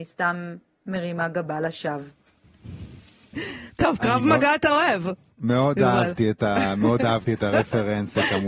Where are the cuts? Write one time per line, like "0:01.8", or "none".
none